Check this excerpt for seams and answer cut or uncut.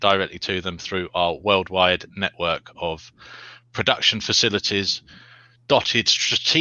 uncut